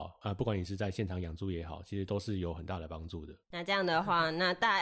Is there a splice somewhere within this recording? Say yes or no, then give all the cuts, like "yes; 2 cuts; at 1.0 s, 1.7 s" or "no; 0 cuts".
yes; 1 cut; at 3.4 s